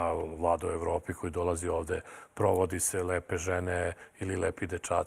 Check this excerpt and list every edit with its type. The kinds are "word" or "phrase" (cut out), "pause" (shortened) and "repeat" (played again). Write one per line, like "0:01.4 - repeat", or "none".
none